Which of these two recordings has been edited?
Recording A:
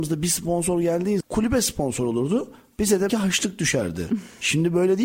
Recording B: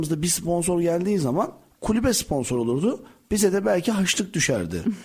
A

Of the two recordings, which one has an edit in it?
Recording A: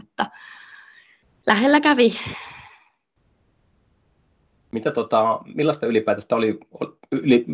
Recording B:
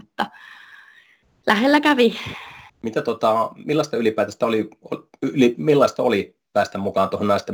B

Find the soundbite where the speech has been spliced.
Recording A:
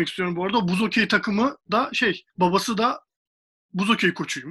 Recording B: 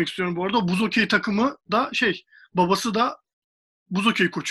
A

